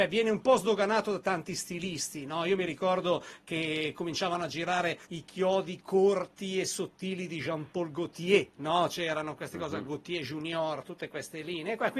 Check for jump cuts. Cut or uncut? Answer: cut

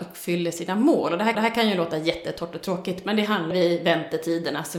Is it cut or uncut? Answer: cut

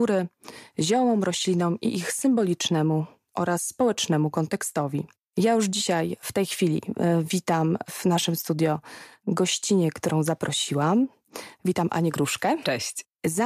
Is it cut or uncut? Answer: uncut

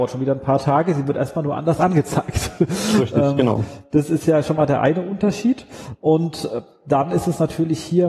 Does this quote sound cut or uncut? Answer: uncut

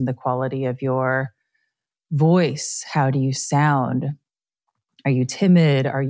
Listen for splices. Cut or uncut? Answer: uncut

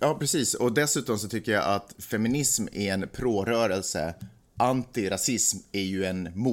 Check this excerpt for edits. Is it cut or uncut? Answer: uncut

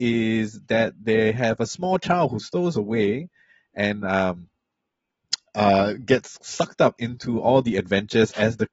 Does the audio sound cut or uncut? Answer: uncut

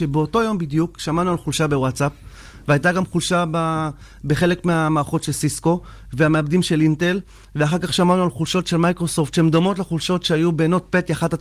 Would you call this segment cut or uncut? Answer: uncut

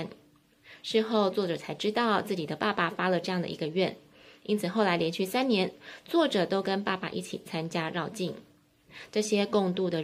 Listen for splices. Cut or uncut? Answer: uncut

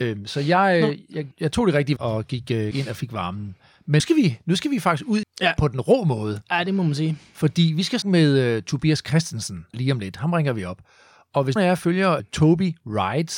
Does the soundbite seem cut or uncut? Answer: cut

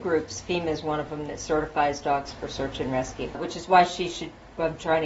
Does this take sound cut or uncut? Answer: uncut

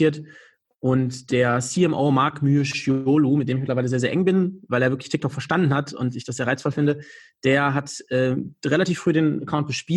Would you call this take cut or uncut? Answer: uncut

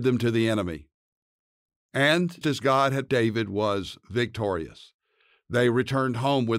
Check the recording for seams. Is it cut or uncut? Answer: cut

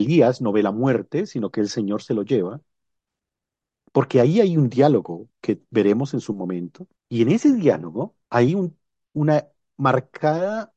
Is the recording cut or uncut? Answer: cut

